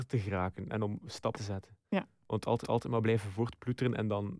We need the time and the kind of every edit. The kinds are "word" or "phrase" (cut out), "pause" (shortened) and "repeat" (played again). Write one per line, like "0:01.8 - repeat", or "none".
0:01.3 - word
0:02.6 - repeat